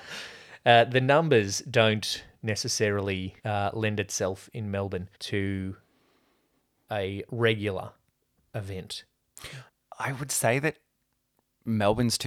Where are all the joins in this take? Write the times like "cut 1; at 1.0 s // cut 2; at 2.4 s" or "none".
cut 1; at 3.4 s // cut 2; at 5.1 s // cut 3; at 9.7 s